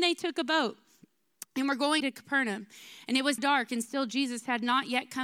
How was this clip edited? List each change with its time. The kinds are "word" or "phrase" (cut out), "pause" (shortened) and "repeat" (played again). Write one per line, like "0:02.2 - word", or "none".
0:02.0 - phrase
0:03.4 - word